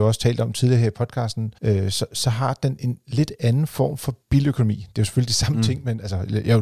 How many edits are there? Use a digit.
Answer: 2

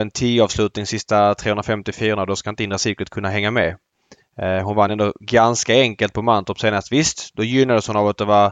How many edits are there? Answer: 0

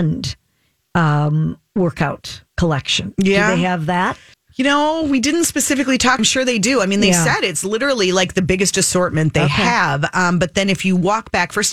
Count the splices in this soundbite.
3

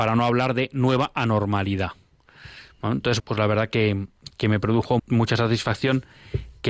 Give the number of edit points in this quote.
2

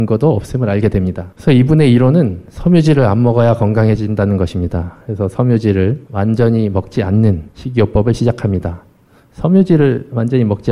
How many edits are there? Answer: 1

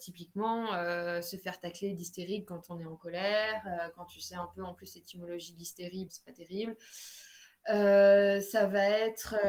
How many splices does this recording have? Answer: 1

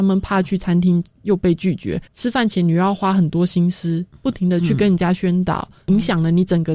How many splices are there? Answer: 1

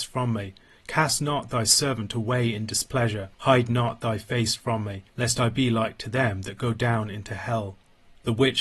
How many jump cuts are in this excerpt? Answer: 2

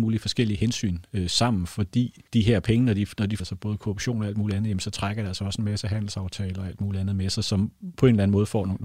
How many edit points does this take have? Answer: 2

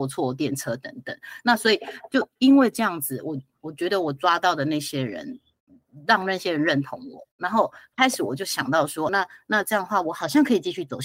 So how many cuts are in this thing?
1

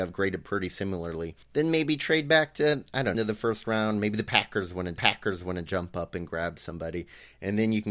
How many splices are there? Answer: 3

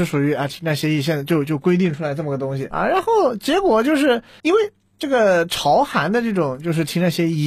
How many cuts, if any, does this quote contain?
2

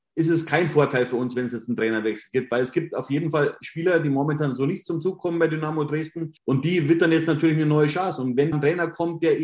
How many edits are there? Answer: 2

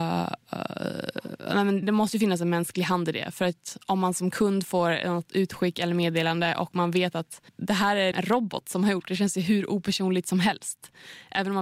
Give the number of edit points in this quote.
3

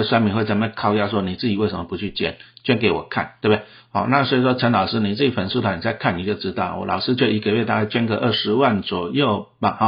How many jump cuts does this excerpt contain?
0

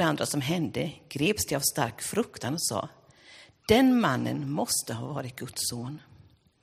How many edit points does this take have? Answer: 0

